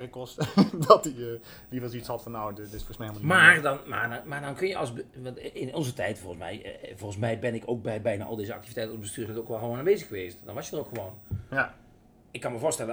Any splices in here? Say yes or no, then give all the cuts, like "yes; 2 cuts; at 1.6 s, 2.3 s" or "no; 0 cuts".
no; 0 cuts